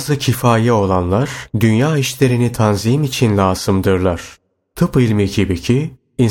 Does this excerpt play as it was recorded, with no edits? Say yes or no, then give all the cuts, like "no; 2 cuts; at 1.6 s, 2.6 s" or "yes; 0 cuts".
no; 1 cut; at 1.5 s